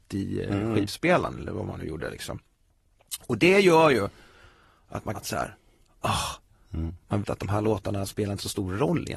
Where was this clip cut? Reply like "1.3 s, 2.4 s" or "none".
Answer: 5.1 s, 7.2 s